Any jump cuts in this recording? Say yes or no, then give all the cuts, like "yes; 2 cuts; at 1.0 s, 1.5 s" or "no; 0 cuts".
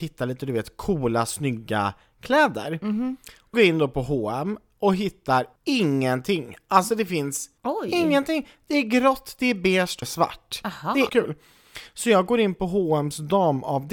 yes; 5 cuts; at 3.5 s, 5.6 s, 7.6 s, 10.0 s, 11.1 s